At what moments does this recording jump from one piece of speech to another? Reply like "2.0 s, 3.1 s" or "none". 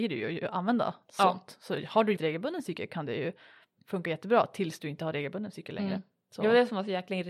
2.2 s